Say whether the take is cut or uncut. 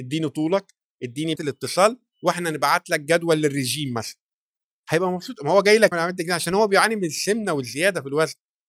cut